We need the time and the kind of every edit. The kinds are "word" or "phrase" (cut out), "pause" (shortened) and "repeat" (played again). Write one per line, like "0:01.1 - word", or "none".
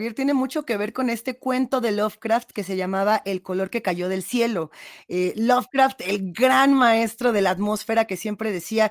none